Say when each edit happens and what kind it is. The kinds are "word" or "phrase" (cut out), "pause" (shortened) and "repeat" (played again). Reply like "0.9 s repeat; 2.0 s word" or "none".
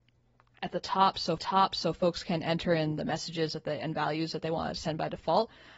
1.4 s repeat